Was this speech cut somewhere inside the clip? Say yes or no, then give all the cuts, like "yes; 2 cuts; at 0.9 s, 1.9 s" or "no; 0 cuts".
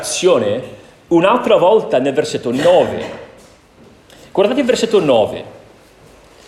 no; 0 cuts